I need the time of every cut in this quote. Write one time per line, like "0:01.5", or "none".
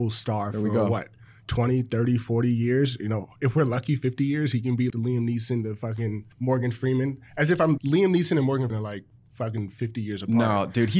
0:04.9
0:06.3
0:07.8
0:08.7

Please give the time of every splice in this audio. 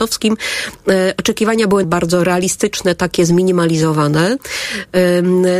0:01.8

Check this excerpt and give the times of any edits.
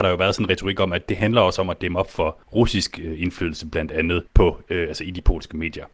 0:02.4
0:04.3

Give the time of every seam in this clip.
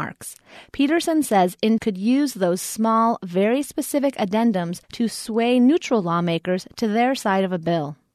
0:01.8
0:04.8

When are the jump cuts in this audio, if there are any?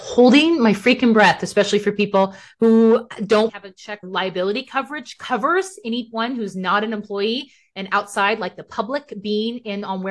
0:03.5
0:04.0

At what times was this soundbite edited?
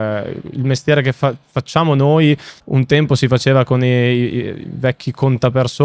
0:02.6

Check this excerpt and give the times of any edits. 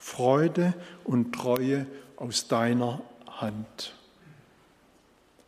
none

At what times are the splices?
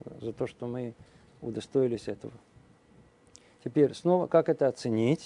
none

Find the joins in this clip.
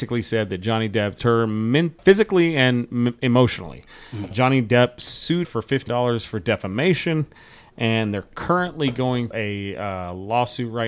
0:01.2
0:02.0
0:04.3
0:05.4
0:05.9
0:09.3

